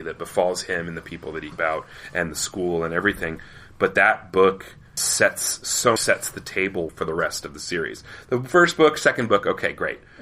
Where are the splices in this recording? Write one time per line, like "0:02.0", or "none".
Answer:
0:01.5
0:05.0
0:06.0
0:06.9